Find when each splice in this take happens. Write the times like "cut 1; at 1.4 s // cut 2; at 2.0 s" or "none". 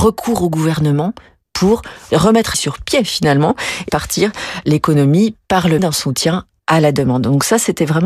cut 1; at 2.5 s // cut 2; at 3.9 s // cut 3; at 5.8 s